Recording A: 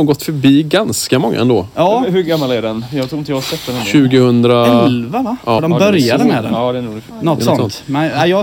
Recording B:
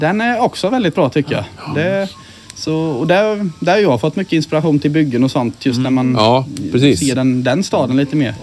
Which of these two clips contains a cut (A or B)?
A